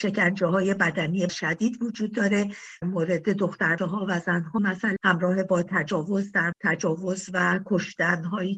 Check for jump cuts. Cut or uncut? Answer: cut